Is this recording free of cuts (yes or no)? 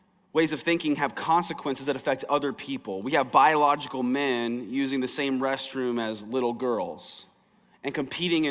yes